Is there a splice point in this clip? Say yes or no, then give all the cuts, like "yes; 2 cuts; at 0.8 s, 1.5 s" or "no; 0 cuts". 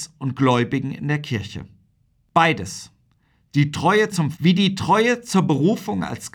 yes; 1 cut; at 4.3 s